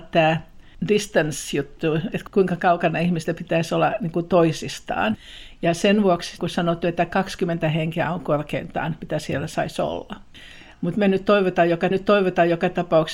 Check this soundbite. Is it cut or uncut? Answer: cut